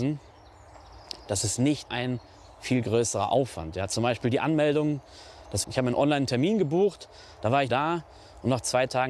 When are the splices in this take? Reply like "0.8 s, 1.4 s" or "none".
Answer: 1.9 s, 5.6 s, 7.7 s